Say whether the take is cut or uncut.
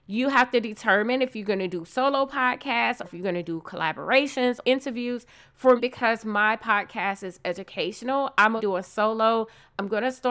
cut